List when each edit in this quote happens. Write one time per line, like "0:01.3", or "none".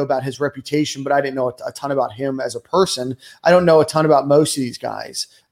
none